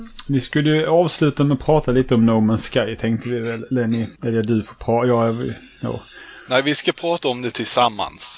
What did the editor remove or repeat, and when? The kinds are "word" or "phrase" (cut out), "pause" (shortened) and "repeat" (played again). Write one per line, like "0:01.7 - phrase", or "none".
0:04.2 - pause